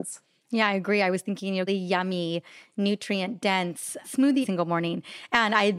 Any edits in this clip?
yes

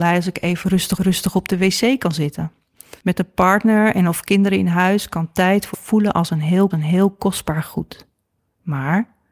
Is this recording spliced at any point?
yes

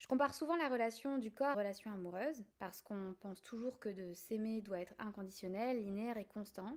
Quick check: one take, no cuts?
no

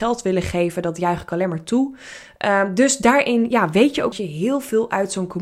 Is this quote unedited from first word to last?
no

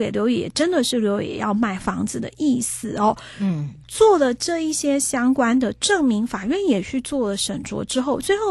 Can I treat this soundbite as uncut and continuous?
no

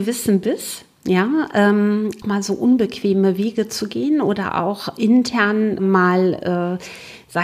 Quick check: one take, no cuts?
no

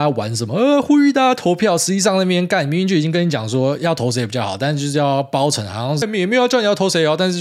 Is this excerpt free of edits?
no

